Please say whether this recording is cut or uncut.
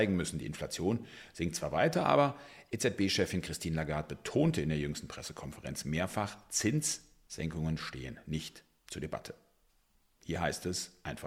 uncut